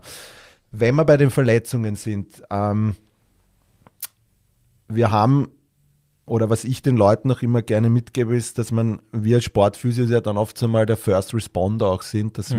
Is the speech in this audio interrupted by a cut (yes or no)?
no